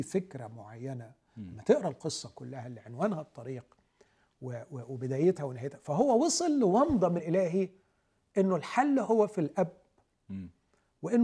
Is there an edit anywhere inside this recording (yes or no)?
yes